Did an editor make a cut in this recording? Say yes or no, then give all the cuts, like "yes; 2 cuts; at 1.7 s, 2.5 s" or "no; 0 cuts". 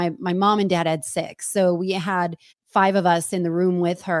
yes; 1 cut; at 2.5 s